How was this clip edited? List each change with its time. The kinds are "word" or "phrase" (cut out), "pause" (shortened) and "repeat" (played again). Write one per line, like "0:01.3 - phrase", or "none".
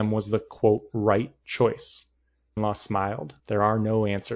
0:02.6 - phrase
0:03.4 - pause